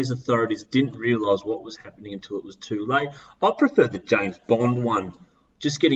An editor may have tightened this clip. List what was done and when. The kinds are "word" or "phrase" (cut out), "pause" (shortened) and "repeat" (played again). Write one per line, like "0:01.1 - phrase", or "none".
none